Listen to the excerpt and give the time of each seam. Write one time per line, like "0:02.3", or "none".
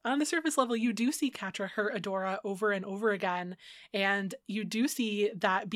none